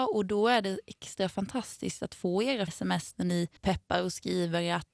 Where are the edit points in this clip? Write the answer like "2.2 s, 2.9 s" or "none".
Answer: 2.7 s